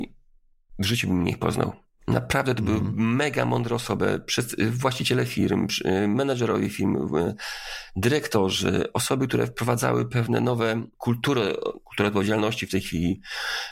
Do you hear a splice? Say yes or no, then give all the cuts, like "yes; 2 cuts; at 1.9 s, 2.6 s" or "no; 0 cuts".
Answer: no; 0 cuts